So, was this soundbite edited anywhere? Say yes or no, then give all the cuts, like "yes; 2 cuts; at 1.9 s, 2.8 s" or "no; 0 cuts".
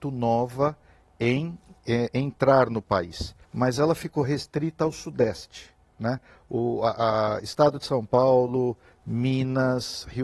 yes; 1 cut; at 3.4 s